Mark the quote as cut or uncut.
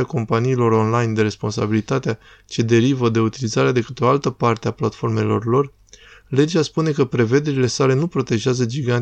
uncut